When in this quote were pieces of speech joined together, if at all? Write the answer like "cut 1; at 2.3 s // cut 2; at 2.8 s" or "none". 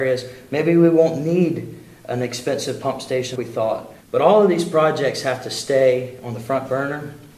cut 1; at 3.4 s // cut 2; at 4.0 s